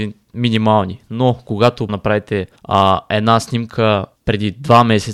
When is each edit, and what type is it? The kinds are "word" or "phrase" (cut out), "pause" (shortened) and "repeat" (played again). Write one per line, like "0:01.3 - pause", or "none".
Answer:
0:01.9 - word
0:02.6 - pause
0:04.1 - pause